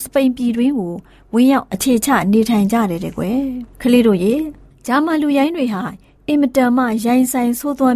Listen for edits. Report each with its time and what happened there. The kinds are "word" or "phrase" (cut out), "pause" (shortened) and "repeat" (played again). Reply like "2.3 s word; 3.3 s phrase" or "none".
3.7 s pause